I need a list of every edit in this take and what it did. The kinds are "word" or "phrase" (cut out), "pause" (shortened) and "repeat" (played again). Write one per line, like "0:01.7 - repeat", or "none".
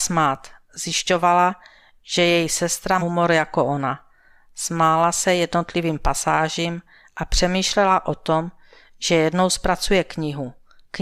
0:03.0 - phrase